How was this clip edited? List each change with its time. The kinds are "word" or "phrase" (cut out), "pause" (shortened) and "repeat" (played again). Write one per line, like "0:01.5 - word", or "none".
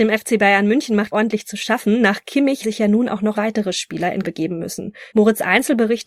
0:01.1 - word
0:02.6 - word
0:03.3 - word
0:04.2 - word
0:05.1 - pause